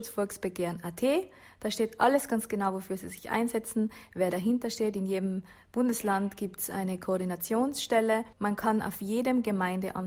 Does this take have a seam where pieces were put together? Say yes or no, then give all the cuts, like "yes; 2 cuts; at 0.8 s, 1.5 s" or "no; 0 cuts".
yes; 1 cut; at 8.3 s